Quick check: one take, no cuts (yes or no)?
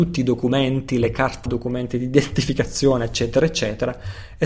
no